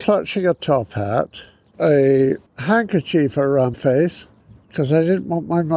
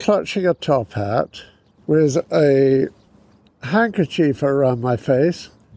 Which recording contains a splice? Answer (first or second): first